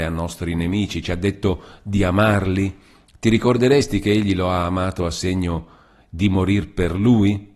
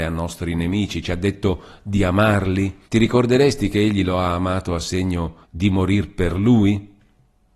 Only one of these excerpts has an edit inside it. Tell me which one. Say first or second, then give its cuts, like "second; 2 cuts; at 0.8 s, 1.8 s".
second; 2 cuts; at 2.8 s, 5.4 s